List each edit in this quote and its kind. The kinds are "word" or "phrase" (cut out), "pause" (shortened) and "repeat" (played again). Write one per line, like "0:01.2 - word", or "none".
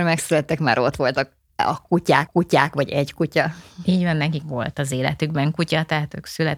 0:02.3 - repeat
0:04.4 - word